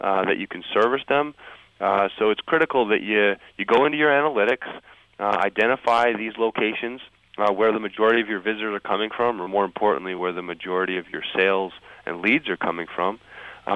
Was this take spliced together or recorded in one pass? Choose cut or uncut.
uncut